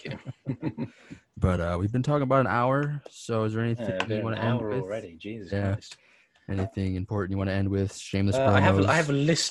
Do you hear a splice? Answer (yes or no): no